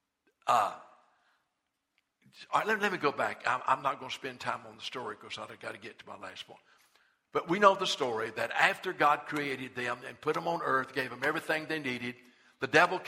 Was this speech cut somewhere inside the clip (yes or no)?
no